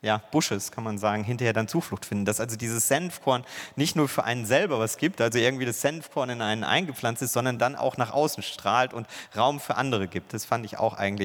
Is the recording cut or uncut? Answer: uncut